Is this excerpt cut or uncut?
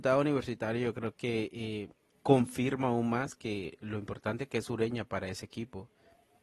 cut